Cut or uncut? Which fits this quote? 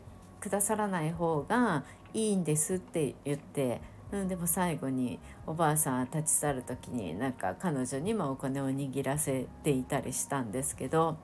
uncut